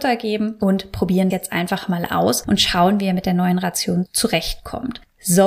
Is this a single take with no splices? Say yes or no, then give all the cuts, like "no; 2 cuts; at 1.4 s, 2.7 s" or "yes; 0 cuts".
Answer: no; 1 cut; at 1.3 s